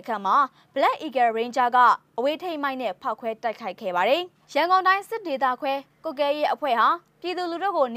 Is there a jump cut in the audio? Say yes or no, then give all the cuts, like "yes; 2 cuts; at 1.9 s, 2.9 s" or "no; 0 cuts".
yes; 1 cut; at 4.4 s